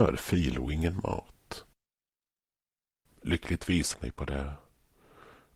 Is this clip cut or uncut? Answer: cut